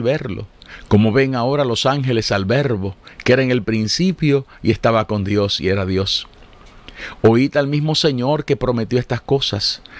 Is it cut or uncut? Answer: uncut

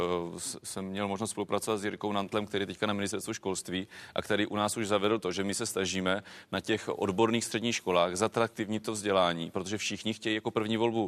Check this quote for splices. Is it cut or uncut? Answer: uncut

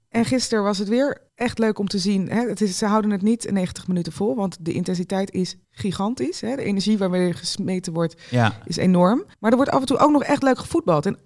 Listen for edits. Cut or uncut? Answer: cut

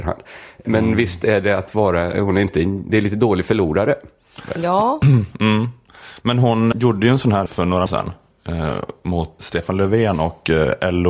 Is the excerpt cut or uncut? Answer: cut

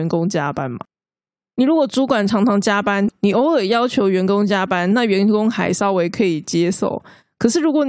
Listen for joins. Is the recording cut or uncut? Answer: uncut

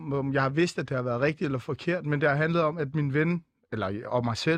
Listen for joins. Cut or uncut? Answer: uncut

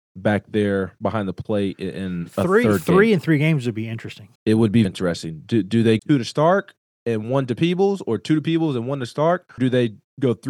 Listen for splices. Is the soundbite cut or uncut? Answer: cut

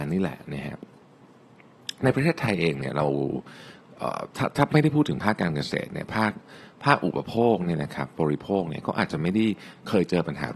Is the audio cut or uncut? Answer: uncut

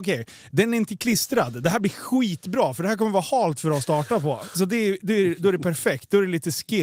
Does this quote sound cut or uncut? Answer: cut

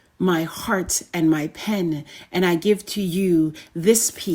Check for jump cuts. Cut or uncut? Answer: uncut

